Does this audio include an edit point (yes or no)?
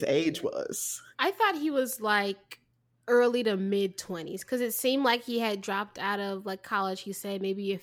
yes